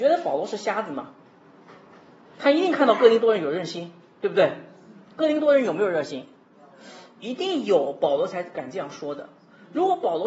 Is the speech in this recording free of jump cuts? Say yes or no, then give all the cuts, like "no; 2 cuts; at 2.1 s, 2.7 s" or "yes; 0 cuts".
yes; 0 cuts